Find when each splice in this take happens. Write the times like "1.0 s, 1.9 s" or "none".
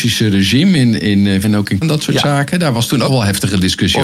1.4 s, 1.8 s, 3.1 s